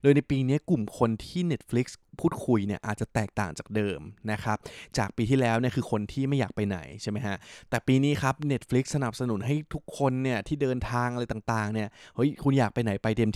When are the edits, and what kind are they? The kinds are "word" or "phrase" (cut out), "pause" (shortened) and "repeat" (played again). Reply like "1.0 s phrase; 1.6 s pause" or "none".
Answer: none